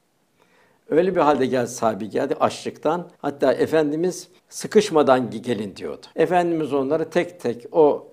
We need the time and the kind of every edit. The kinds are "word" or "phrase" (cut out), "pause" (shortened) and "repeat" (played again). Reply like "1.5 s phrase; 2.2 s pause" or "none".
3.1 s pause; 4.4 s pause; 6.1 s pause